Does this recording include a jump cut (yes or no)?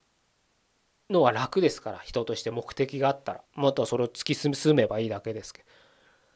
yes